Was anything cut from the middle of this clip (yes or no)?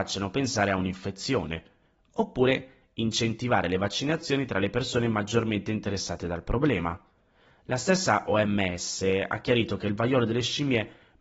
no